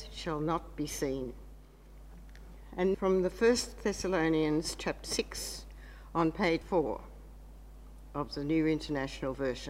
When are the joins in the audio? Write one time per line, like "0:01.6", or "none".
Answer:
0:02.9
0:05.0
0:06.6